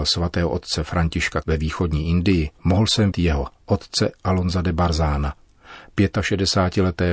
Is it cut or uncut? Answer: cut